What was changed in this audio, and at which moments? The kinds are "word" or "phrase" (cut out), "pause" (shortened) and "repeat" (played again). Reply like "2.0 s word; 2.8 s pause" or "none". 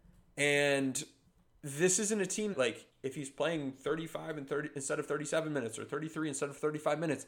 1.3 s pause; 2.5 s word; 2.9 s pause